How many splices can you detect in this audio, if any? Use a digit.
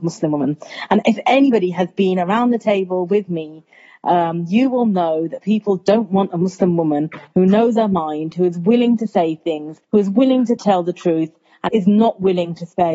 2